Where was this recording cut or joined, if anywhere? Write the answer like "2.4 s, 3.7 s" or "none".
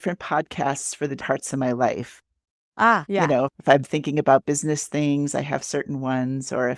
1.2 s